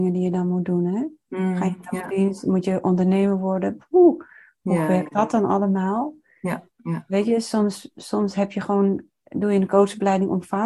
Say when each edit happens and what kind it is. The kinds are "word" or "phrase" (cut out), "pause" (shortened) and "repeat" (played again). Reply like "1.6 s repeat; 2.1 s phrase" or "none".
none

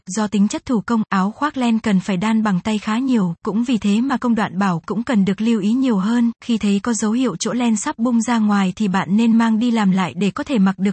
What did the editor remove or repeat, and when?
4.8 s word

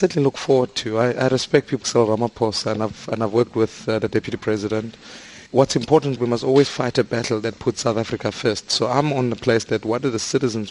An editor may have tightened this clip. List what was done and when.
1.8 s word; 5.5 s pause; 6.2 s phrase

